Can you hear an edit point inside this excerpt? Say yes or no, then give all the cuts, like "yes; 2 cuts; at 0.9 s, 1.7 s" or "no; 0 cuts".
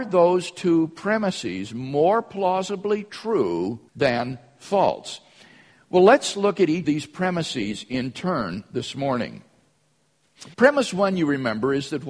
yes; 3 cuts; at 3.9 s, 6.8 s, 10.5 s